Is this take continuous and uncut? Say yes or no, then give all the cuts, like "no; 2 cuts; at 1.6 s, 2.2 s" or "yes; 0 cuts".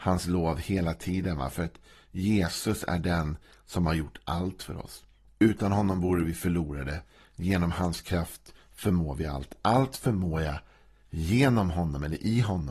yes; 0 cuts